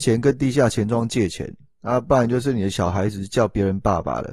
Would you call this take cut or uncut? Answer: uncut